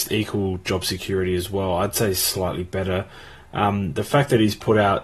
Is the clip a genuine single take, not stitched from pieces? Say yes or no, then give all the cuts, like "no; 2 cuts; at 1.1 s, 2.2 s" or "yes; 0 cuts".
yes; 0 cuts